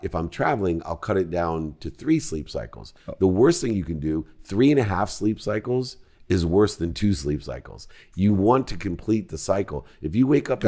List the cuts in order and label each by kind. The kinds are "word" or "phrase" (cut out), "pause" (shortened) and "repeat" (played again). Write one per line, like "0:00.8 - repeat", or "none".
none